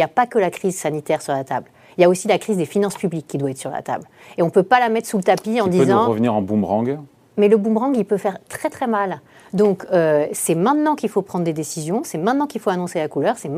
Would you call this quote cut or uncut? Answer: uncut